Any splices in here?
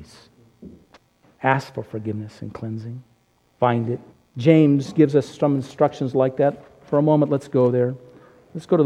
yes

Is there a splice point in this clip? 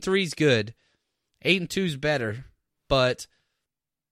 no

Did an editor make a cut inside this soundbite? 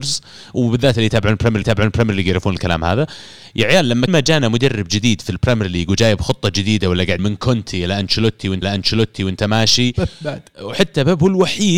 yes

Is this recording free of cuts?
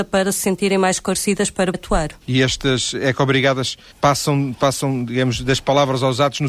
no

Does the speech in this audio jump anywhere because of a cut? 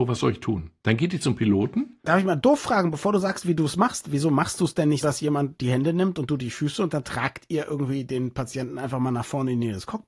yes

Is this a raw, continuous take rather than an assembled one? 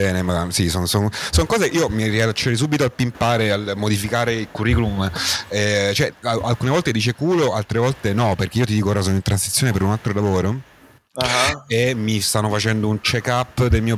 yes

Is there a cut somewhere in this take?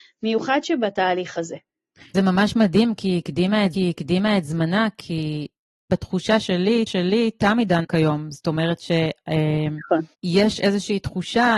yes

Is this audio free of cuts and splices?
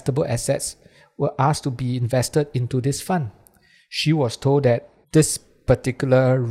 no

